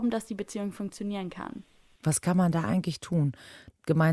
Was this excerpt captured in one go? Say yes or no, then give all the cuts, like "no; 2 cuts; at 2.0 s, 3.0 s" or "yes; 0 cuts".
yes; 0 cuts